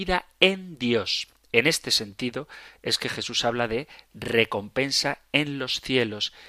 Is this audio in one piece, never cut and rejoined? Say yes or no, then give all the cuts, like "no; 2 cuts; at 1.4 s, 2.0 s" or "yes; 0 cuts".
yes; 0 cuts